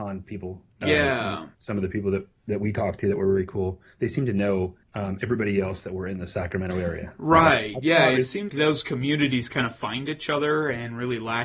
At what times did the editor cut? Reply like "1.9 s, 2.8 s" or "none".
1.5 s, 4.8 s, 8.5 s